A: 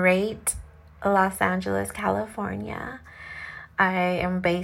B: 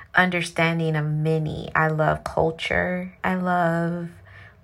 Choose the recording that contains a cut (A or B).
B